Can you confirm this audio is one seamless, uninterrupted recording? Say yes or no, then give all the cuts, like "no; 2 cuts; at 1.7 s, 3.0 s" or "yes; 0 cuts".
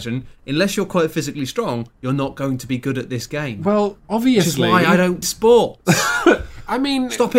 no; 1 cut; at 5.2 s